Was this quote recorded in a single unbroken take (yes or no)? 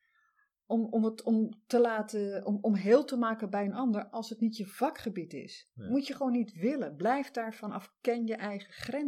yes